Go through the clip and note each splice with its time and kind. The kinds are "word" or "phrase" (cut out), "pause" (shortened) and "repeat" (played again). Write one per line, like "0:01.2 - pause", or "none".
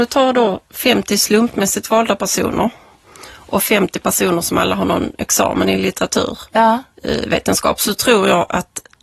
none